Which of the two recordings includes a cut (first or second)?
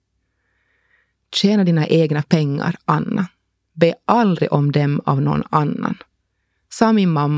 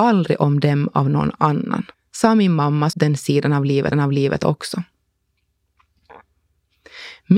second